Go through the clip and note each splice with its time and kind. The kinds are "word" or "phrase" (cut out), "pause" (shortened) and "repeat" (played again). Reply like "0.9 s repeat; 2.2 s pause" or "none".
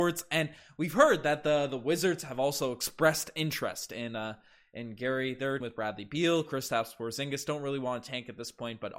5.6 s word